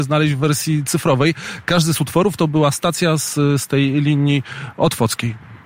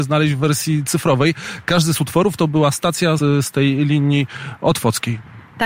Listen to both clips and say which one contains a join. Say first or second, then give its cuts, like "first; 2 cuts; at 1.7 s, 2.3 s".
second; 1 cut; at 3.2 s